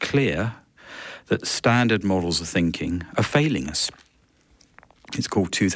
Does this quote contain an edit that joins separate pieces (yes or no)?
no